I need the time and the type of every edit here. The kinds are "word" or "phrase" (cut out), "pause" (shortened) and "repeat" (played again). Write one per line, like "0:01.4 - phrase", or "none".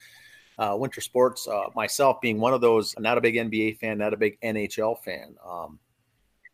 0:02.9 - word